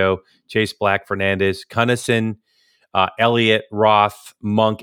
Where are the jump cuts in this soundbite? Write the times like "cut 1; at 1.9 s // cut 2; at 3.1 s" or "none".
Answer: none